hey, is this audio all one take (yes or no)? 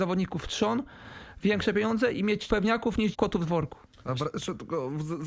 no